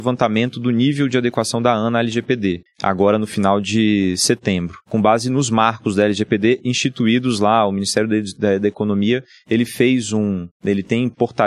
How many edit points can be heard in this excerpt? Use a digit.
3